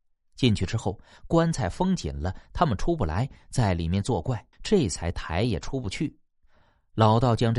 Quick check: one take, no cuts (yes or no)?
no